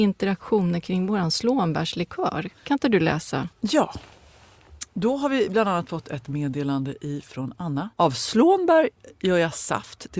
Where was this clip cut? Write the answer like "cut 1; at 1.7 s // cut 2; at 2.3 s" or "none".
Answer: cut 1; at 2.6 s // cut 2; at 3.5 s // cut 3; at 7.9 s